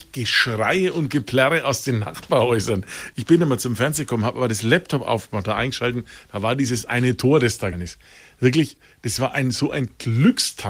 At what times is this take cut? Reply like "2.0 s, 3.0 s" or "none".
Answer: 7.7 s